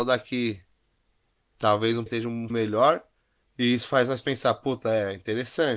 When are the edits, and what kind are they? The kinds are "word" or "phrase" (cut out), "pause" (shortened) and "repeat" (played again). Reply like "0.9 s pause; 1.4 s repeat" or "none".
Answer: 2.1 s word; 2.5 s word